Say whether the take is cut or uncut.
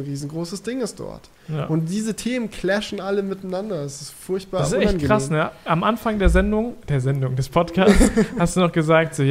uncut